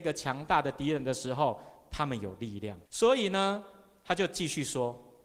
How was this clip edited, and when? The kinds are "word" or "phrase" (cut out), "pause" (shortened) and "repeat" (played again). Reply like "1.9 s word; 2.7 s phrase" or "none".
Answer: 2.9 s pause